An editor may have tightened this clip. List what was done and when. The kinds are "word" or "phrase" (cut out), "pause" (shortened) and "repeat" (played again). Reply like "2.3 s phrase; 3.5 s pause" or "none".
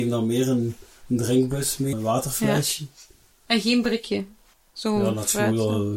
1.9 s word